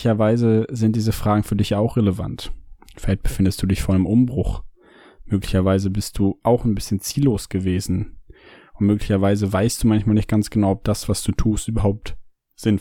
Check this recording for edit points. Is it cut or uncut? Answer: uncut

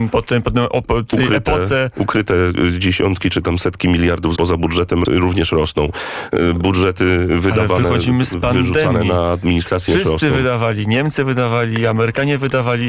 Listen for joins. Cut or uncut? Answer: cut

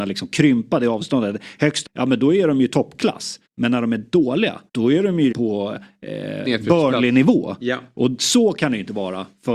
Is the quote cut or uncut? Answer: cut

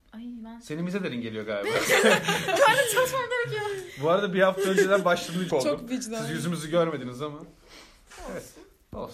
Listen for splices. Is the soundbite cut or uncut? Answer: cut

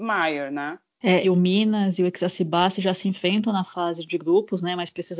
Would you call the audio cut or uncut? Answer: cut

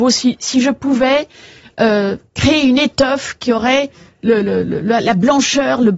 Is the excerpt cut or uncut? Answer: uncut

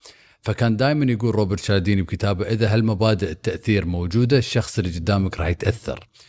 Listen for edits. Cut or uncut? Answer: uncut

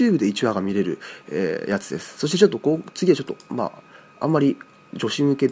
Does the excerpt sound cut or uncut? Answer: uncut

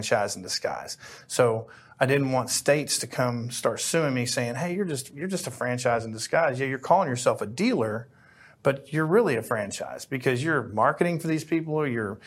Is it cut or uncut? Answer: uncut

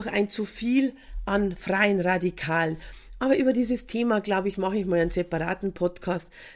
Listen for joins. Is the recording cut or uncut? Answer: uncut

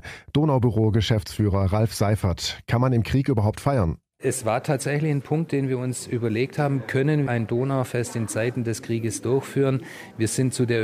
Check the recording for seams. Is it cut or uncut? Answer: cut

